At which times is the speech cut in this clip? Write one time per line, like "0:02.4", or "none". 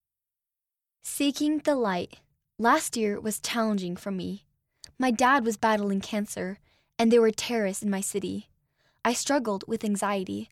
0:07.8